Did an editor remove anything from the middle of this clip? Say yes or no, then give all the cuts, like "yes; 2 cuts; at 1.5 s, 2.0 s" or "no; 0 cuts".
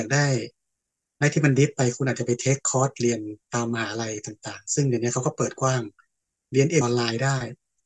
yes; 1 cut; at 6.8 s